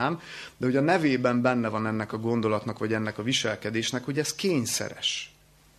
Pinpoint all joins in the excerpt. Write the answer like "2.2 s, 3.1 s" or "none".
none

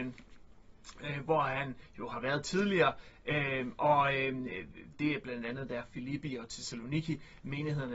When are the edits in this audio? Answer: 4.9 s

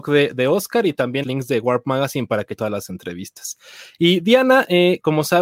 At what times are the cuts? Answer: 1.2 s, 2.6 s

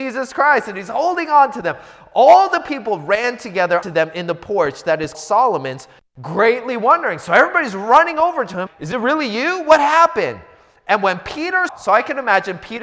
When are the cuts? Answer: 3.8 s, 5.1 s, 8.7 s, 11.7 s

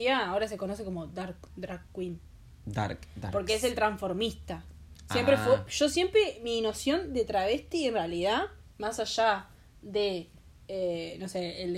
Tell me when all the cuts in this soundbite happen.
none

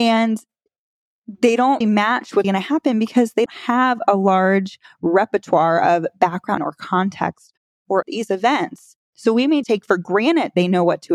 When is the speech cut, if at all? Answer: 1.8 s, 2.4 s, 3.5 s, 6.6 s, 8.0 s, 9.0 s, 9.6 s

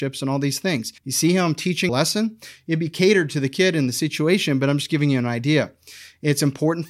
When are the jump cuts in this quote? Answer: 1.0 s, 1.9 s

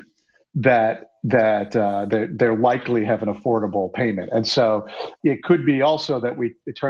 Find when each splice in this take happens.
5.2 s

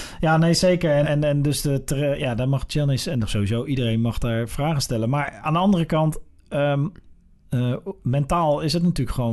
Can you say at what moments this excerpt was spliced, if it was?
1.0 s

